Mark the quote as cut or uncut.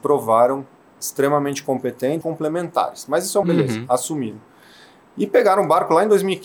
cut